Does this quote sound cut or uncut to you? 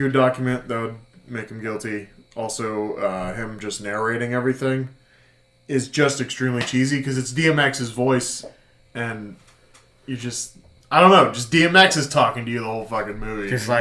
uncut